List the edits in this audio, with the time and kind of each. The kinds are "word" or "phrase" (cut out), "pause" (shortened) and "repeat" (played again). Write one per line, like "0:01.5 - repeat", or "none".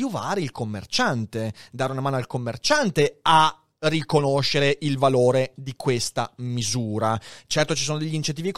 none